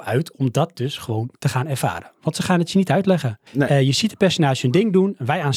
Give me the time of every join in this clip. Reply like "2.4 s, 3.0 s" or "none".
3.5 s